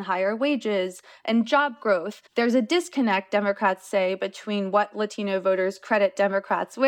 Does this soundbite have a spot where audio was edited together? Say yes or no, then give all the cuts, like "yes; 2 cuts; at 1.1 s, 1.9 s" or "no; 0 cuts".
yes; 1 cut; at 2.3 s